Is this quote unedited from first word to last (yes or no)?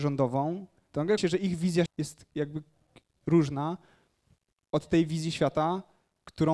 no